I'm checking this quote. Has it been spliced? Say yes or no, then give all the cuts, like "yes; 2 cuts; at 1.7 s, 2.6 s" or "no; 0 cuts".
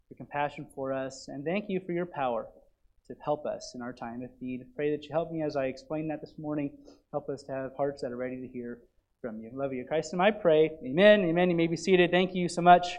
no; 0 cuts